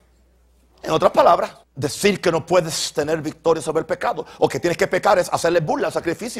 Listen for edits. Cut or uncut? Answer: cut